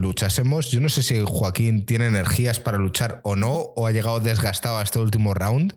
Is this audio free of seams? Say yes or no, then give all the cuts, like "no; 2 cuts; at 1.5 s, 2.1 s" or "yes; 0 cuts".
yes; 0 cuts